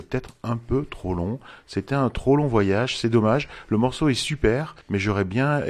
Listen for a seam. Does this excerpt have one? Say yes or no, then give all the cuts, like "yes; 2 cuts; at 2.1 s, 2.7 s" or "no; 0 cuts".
yes; 1 cut; at 4.8 s